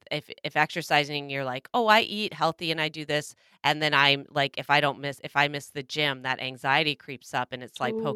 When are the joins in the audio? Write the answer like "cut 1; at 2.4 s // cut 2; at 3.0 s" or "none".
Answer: none